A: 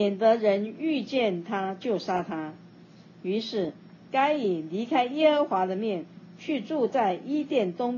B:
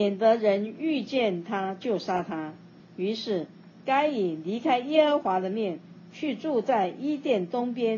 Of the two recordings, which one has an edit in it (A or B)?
B